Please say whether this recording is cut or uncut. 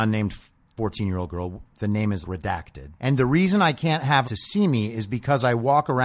cut